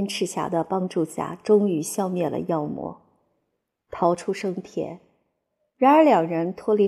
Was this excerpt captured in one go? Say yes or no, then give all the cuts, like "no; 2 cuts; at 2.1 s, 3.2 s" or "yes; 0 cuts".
yes; 0 cuts